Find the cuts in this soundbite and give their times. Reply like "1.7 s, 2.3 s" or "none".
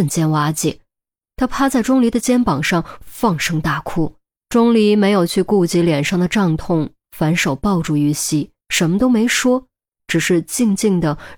4.4 s, 8.6 s

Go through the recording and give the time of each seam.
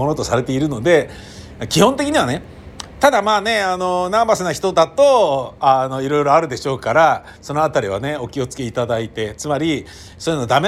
7.4 s

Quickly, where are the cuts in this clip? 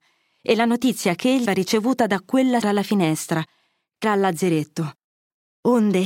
1.5 s, 2.6 s, 4.0 s

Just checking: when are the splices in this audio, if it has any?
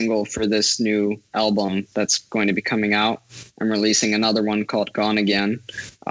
1.3 s

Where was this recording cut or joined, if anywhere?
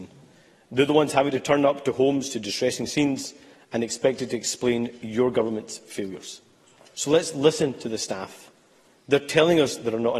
none

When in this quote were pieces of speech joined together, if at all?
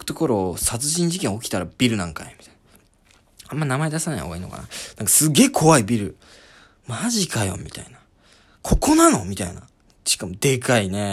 none

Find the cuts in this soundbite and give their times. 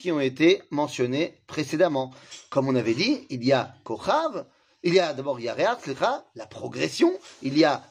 none

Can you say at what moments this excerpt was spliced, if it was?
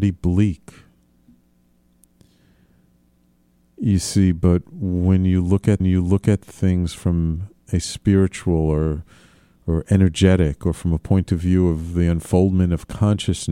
5.8 s

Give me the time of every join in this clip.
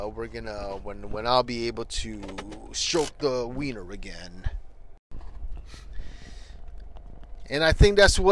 none

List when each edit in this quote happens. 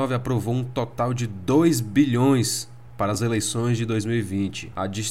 none

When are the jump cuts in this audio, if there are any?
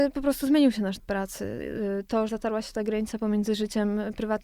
1.0 s, 2.3 s

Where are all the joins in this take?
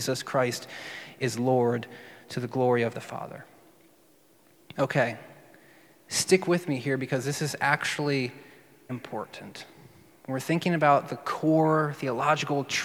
2.9 s, 8.9 s

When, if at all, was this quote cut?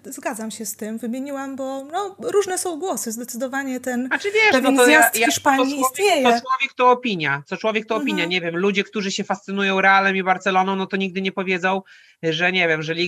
none

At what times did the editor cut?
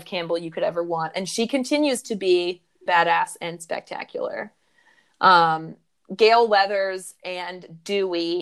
2.9 s

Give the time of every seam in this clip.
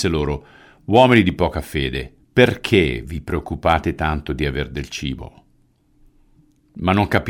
2.2 s

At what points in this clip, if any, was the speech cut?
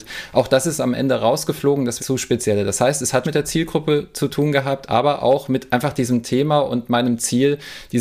2.0 s, 3.2 s

